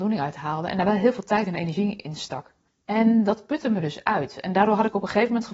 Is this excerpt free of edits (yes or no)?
no